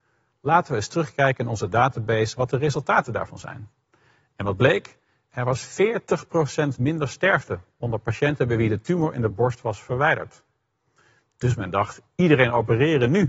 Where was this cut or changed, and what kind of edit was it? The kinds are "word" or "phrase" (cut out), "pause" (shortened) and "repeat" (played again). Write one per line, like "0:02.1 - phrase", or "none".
none

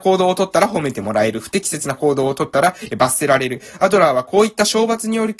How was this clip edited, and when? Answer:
none

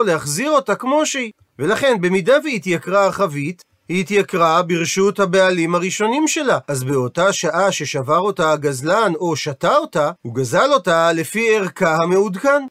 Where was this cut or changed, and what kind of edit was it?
0:06.6 - pause
0:10.2 - pause

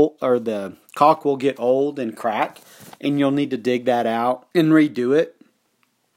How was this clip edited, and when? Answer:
0:04.5 - pause

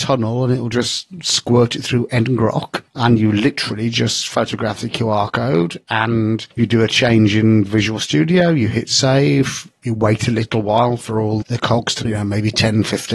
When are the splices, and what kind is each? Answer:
0:11.4 - word
0:12.1 - word

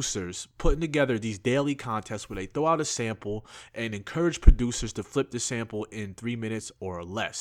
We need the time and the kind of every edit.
none

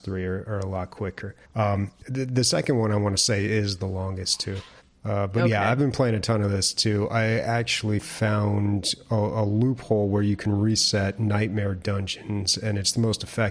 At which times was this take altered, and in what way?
0:01.4 - pause
0:04.8 - pause

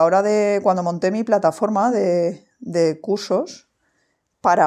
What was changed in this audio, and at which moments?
none

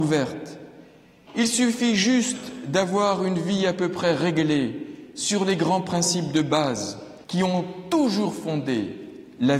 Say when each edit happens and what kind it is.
0:07.2 - pause

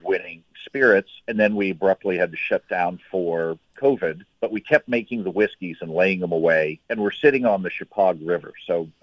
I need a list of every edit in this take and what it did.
0:01.2 - pause
0:04.3 - pause
0:06.8 - pause

